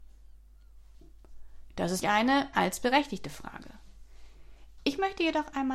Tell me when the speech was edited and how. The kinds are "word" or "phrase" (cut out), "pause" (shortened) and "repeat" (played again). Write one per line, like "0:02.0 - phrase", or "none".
0:02.0 - word
0:02.5 - word